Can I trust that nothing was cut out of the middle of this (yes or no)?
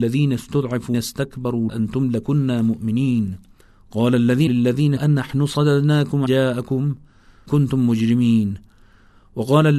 no